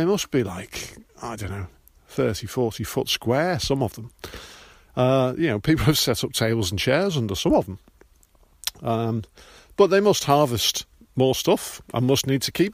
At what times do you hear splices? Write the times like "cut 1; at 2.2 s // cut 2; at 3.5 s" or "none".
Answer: none